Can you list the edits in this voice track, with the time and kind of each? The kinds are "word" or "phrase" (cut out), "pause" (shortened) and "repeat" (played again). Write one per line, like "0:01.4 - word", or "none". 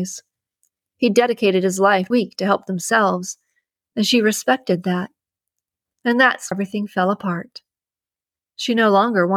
0:02.1 - phrase
0:06.5 - word